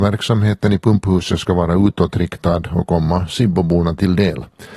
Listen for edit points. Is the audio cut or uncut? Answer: uncut